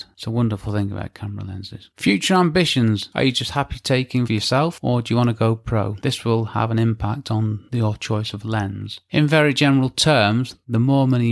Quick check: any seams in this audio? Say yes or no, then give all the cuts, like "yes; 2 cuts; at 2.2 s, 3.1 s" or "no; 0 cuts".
yes; 1 cut; at 4.3 s